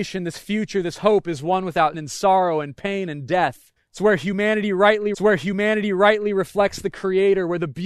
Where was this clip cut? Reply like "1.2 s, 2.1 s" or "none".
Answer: 1.9 s, 3.8 s, 5.1 s